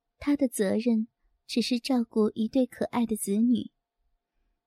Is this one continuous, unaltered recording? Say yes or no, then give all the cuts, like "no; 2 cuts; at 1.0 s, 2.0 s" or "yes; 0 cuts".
yes; 0 cuts